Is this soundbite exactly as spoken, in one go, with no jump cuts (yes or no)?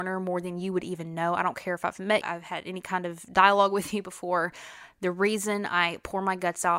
no